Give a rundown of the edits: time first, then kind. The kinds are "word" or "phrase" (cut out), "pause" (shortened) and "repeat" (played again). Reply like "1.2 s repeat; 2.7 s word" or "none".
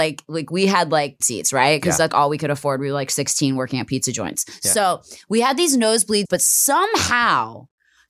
1.2 s word; 2.1 s word; 6.2 s word